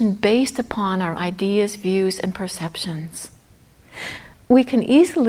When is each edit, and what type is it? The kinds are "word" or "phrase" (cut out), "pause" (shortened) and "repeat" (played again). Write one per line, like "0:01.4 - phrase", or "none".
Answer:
0:01.2 - word